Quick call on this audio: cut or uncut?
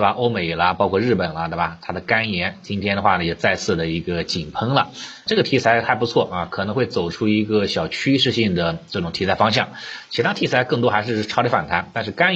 cut